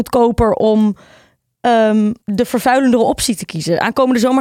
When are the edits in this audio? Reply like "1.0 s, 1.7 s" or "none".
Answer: 2.2 s